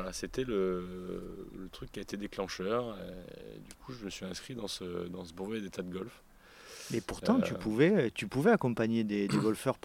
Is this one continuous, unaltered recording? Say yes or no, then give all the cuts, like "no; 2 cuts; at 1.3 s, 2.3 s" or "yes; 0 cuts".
yes; 0 cuts